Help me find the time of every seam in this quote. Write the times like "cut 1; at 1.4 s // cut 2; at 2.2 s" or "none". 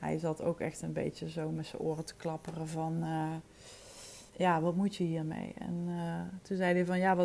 cut 1; at 4.3 s